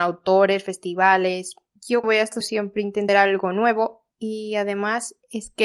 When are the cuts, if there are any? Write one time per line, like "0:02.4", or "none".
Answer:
0:02.0
0:02.4
0:03.1
0:04.1

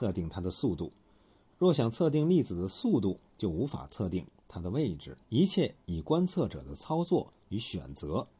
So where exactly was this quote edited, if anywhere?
0:03.3
0:05.2

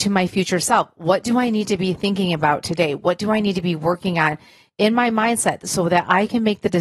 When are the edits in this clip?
none

